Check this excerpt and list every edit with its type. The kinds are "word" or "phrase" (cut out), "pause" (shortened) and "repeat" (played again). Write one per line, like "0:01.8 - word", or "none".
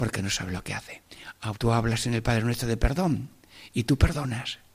0:01.5 - word